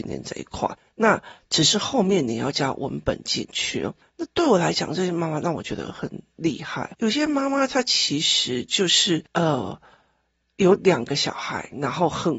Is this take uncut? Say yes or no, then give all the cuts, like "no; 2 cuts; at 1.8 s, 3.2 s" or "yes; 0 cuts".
yes; 0 cuts